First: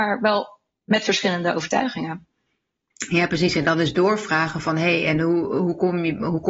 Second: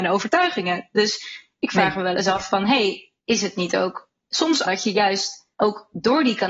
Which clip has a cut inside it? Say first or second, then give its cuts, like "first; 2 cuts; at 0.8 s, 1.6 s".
second; 3 cuts; at 3.2 s, 4.6 s, 5.5 s